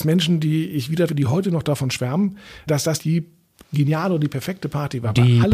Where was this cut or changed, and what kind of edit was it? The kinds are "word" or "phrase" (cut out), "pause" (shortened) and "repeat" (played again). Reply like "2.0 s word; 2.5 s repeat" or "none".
1.1 s word; 2.7 s word; 3.0 s word